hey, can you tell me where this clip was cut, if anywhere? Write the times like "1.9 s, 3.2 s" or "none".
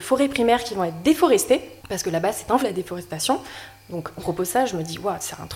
1.8 s, 2.6 s, 4.2 s